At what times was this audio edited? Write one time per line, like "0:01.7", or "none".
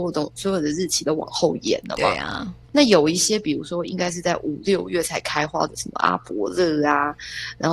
0:02.6